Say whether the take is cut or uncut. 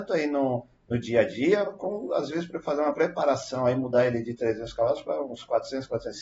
uncut